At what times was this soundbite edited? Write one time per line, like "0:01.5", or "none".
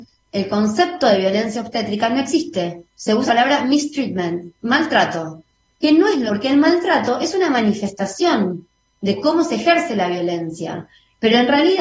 0:02.9
0:03.3
0:06.3